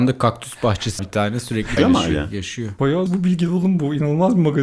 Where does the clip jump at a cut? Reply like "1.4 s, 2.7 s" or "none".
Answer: 1.0 s, 1.8 s, 3.1 s